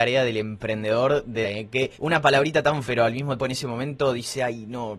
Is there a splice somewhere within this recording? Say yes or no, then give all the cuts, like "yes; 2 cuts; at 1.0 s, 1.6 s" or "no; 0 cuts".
yes; 4 cuts; at 1.4 s, 1.9 s, 2.8 s, 3.4 s